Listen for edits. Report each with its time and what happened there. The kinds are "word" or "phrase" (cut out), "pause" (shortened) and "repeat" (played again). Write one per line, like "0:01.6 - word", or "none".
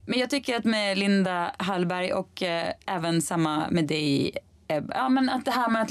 none